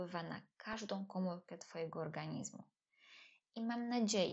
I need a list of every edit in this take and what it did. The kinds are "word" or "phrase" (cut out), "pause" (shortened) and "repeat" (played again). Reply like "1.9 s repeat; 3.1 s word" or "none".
none